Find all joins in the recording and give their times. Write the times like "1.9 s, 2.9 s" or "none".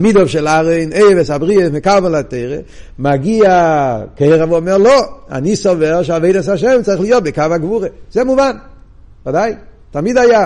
none